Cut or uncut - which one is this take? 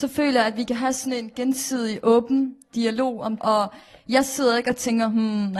cut